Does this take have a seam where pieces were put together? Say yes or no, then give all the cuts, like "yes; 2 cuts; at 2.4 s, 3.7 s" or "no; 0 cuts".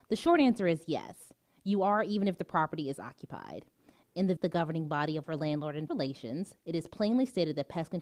yes; 3 cuts; at 4.4 s, 5.2 s, 5.9 s